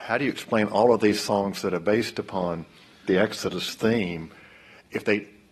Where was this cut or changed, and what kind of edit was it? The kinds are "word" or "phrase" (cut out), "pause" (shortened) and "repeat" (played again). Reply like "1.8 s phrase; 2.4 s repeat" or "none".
none

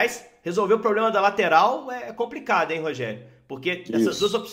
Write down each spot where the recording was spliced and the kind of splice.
none

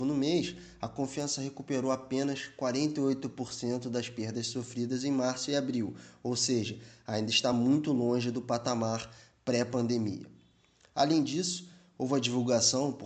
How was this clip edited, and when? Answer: none

